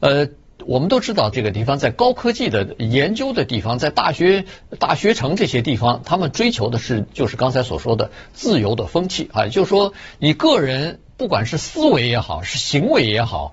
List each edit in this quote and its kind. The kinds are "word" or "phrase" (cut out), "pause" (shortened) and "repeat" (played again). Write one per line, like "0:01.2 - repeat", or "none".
0:01.3 - phrase